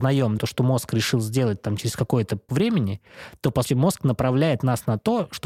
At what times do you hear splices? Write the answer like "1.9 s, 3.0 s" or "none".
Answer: 2.5 s, 3.6 s